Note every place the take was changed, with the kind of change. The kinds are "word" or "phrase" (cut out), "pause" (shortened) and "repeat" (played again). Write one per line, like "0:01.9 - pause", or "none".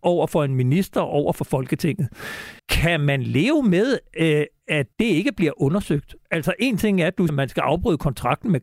0:02.6 - pause
0:04.9 - pause
0:07.3 - word